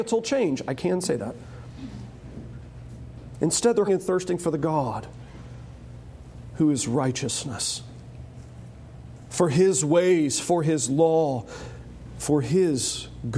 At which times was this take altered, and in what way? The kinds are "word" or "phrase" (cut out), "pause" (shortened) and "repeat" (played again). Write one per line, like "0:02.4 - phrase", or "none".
0:03.9 - word